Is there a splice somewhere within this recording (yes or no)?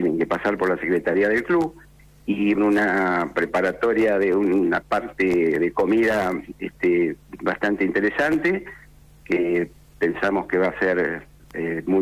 yes